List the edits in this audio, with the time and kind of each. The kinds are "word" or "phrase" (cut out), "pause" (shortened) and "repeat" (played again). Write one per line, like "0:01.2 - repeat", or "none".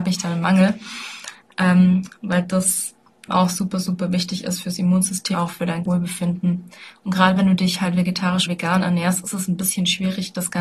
0:03.3 - word
0:05.3 - word
0:05.8 - word
0:08.5 - word

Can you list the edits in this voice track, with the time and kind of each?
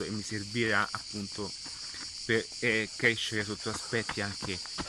none

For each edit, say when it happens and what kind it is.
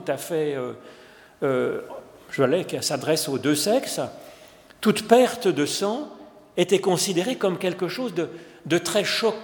none

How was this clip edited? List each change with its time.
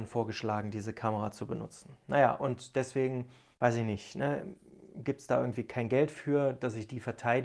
0:03.5 - pause

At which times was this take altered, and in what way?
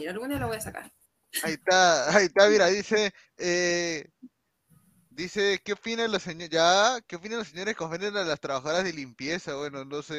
none

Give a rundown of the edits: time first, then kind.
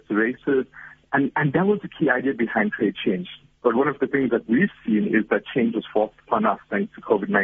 none

